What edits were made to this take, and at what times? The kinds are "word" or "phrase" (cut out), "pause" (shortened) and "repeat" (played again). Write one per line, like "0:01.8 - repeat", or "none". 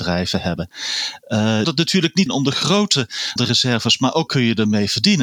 0:01.6 - phrase
0:02.3 - word
0:03.4 - word
0:04.3 - word